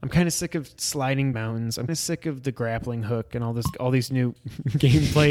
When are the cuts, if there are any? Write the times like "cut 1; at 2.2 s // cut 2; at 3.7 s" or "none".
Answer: cut 1; at 1.3 s // cut 2; at 1.9 s // cut 3; at 3.7 s